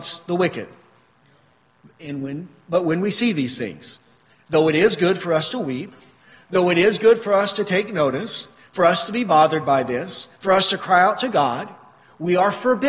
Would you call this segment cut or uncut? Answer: uncut